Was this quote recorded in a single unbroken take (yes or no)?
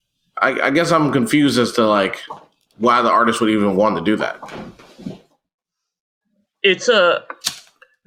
yes